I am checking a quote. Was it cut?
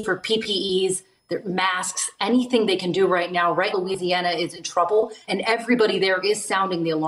yes; 2 cuts; at 3.7 s, 5.3 s

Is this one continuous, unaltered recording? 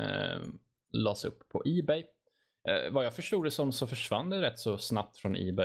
yes; 0 cuts

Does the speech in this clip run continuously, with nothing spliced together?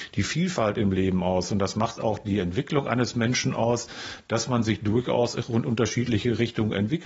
yes; 0 cuts

